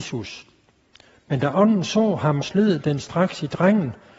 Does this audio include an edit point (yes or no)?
yes